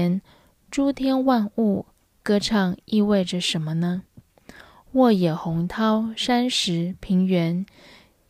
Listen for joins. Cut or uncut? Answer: uncut